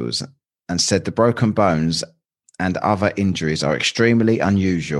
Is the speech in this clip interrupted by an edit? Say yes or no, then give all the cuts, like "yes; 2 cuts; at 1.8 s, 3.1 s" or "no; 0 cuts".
no; 0 cuts